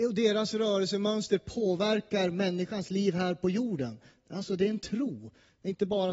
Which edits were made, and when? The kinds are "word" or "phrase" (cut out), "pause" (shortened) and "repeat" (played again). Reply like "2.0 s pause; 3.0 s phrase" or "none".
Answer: none